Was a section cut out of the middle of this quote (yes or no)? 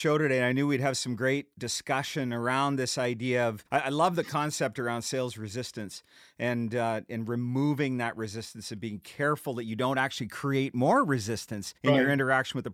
yes